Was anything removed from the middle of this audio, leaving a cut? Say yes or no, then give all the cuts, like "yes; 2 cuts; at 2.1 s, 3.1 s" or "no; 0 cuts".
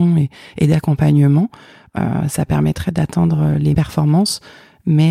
yes; 1 cut; at 3.7 s